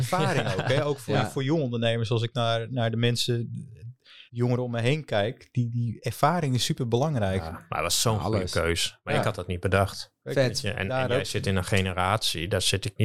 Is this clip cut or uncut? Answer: cut